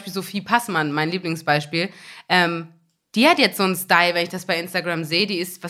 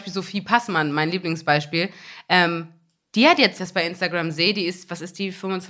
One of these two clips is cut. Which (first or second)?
second